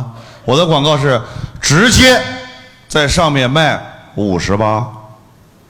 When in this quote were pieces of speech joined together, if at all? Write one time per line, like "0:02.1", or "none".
none